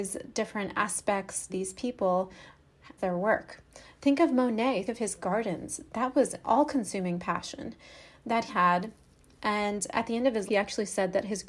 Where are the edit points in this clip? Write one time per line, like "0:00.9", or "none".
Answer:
0:01.5
0:03.0
0:04.9
0:06.4
0:08.5
0:10.5